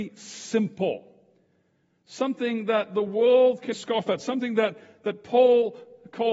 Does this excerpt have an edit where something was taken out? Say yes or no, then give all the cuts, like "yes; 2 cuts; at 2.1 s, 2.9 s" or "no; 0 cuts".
yes; 1 cut; at 3.7 s